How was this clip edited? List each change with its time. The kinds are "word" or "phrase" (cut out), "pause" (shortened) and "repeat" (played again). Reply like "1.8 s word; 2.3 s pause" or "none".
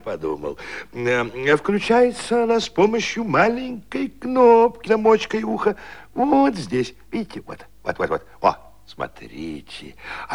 4.9 s word